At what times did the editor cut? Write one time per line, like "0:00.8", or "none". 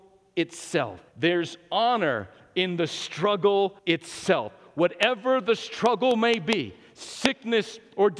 0:01.1
0:03.8